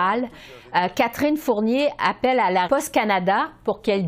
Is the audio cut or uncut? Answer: cut